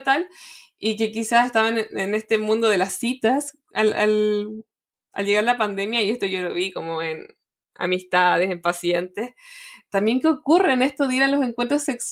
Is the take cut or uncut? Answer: uncut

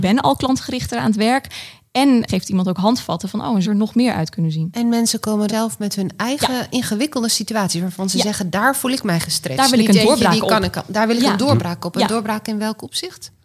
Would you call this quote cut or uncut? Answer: cut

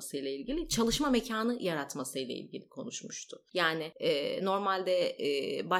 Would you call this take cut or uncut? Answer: uncut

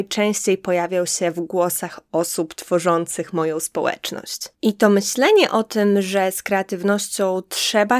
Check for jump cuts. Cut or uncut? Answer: cut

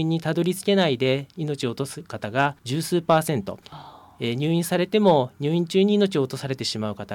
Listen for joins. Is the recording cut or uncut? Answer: cut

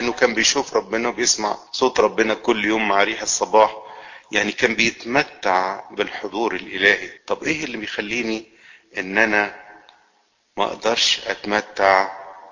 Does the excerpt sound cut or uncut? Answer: cut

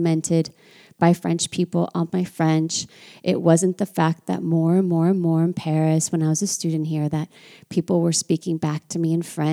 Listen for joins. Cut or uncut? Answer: uncut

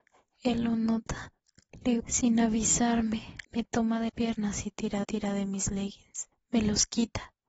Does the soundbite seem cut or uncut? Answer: cut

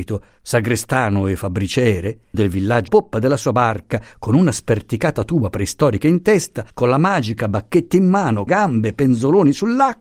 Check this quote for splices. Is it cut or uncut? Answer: cut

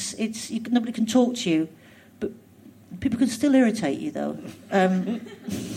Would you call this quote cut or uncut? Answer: uncut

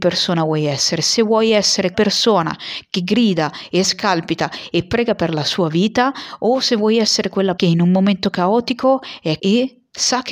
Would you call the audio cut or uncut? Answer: cut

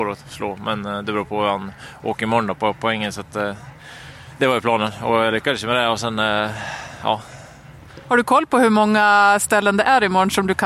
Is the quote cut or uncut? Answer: uncut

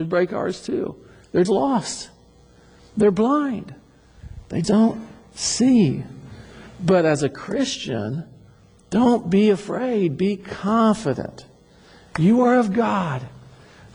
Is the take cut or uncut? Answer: cut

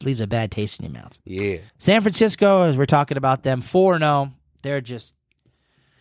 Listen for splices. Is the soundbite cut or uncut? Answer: cut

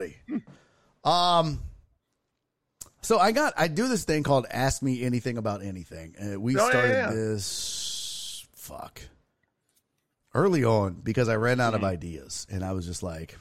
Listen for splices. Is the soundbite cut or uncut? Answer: uncut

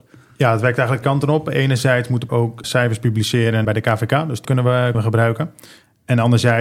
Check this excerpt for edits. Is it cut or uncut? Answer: cut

